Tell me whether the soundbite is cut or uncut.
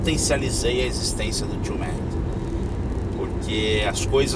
uncut